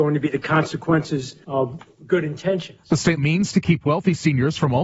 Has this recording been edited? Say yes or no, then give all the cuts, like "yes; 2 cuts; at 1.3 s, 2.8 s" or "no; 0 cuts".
yes; 3 cuts; at 1.4 s, 3.2 s, 3.5 s